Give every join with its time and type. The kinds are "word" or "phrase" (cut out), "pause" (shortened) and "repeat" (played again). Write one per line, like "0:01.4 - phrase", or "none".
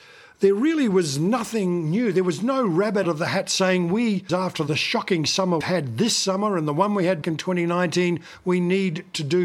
0:03.0 - word
0:04.3 - word
0:05.6 - word
0:07.2 - word